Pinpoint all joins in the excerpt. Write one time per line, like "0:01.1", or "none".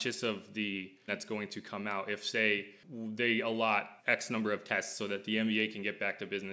0:01.1
0:04.0

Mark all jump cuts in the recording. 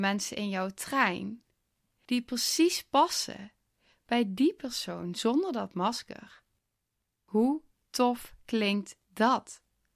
none

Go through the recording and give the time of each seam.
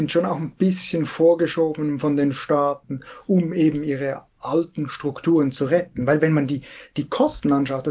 0:04.3

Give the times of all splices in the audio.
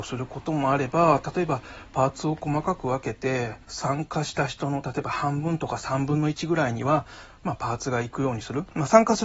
0:03.6

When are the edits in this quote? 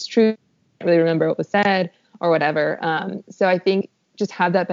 none

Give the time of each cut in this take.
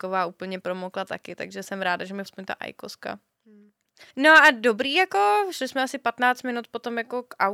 0:02.3
0:04.1

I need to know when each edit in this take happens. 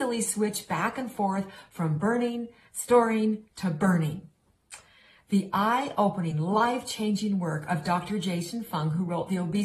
none

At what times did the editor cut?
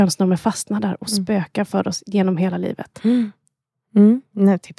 none

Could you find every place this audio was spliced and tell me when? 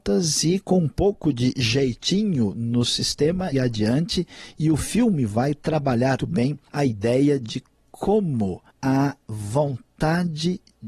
0:03.5
0:06.2
0:08.7

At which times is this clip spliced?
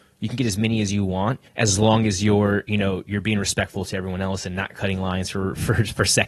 0:01.5

